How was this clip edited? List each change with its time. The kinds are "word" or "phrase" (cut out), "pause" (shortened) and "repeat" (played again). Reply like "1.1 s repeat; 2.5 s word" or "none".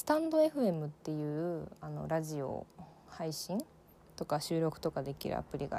none